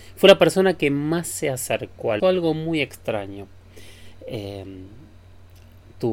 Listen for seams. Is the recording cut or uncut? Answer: cut